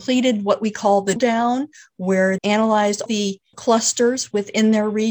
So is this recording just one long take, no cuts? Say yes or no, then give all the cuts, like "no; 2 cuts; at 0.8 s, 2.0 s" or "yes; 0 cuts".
no; 4 cuts; at 1.2 s, 2.4 s, 3.1 s, 3.5 s